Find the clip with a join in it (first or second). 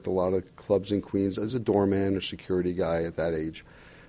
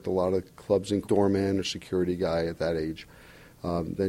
second